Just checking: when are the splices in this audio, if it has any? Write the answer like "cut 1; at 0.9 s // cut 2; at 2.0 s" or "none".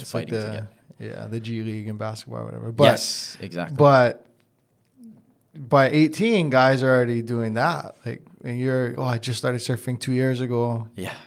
cut 1; at 8.9 s